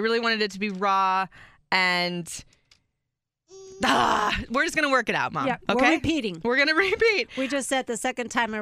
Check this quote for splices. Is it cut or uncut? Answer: uncut